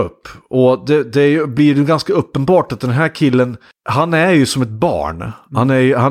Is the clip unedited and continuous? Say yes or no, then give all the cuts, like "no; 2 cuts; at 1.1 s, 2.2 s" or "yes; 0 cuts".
yes; 0 cuts